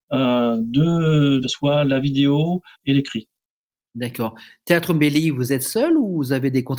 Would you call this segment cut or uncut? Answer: cut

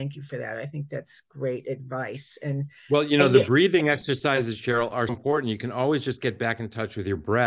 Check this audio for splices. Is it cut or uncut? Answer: cut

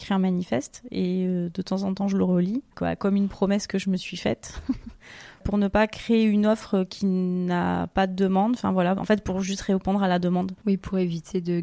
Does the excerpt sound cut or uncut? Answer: cut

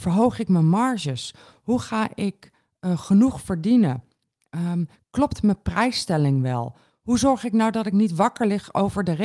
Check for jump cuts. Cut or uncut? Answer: uncut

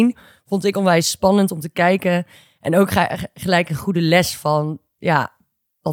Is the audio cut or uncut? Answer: uncut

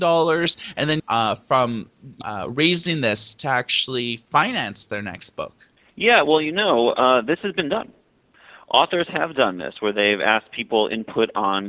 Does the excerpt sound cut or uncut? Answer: cut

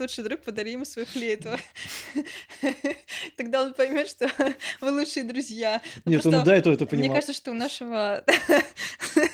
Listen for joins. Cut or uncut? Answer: uncut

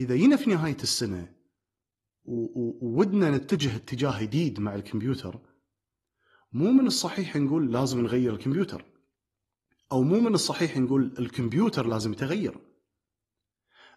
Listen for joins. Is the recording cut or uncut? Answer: uncut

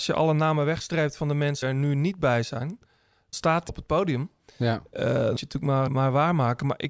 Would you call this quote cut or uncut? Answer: cut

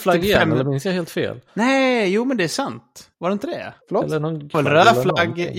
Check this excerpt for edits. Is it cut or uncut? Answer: cut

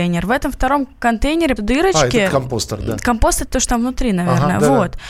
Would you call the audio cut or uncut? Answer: cut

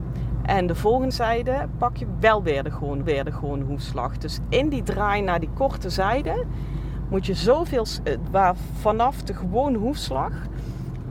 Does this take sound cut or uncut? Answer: cut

